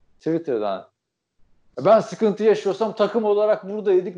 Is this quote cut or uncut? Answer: uncut